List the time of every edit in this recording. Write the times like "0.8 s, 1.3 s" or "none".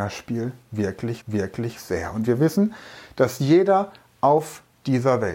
1.2 s